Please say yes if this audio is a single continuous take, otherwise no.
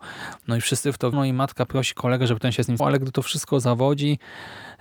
no